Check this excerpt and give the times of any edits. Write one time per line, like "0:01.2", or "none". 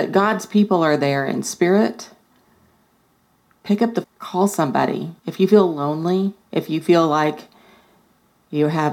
0:04.0
0:05.2
0:06.4

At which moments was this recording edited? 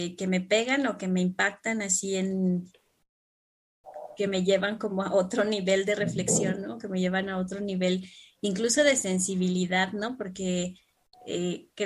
none

